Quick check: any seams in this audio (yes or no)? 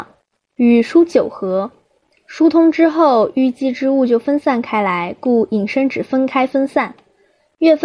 no